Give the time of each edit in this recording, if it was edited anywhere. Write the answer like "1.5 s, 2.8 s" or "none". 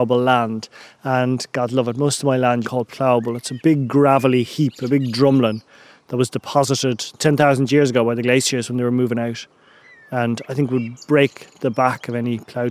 2.6 s, 7.2 s